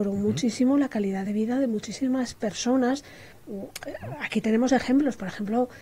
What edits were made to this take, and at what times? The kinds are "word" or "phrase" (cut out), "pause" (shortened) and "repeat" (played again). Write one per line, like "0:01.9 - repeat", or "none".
none